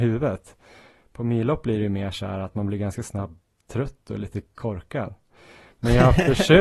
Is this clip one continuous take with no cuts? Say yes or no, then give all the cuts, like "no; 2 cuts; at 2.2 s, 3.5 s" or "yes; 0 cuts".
yes; 0 cuts